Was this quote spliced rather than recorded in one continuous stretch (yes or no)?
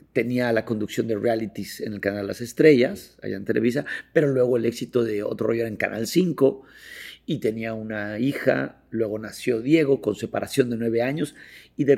no